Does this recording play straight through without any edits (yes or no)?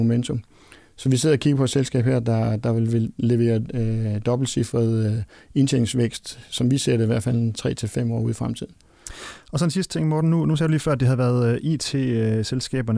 yes